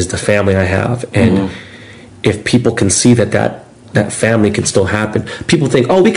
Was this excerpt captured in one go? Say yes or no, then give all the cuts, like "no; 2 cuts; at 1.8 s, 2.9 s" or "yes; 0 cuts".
yes; 0 cuts